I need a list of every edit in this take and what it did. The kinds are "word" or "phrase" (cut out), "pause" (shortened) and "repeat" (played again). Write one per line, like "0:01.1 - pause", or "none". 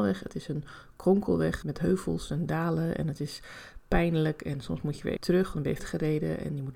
0:01.6 - word
0:05.2 - word
0:05.8 - word